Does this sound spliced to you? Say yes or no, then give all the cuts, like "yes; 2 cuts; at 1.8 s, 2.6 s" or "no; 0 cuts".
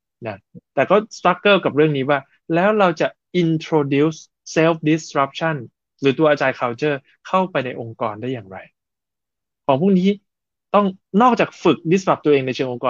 no; 0 cuts